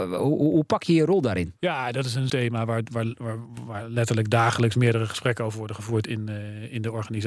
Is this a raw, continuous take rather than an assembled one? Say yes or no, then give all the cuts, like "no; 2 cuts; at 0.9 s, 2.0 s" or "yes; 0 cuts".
no; 2 cuts; at 1.6 s, 2.3 s